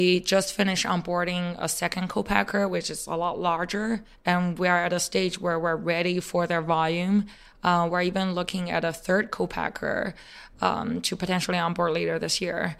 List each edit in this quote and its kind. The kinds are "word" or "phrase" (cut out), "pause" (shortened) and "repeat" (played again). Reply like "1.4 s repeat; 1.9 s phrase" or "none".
none